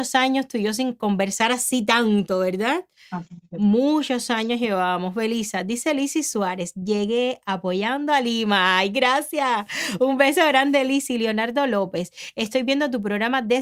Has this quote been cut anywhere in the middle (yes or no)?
no